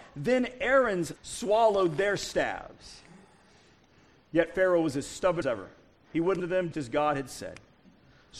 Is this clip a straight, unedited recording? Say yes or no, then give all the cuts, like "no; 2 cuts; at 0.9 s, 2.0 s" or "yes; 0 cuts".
no; 4 cuts; at 1.2 s, 5.4 s, 6.4 s, 6.7 s